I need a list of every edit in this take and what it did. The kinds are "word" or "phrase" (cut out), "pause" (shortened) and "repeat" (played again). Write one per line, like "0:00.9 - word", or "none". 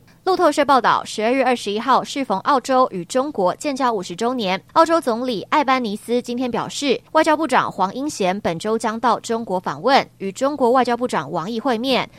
0:04.7 - pause
0:07.1 - pause